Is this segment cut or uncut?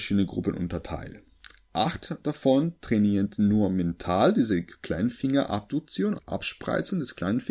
cut